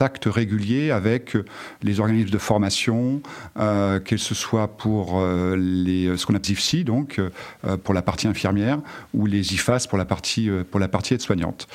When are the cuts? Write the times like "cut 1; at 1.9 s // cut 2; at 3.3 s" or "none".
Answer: cut 1; at 6.4 s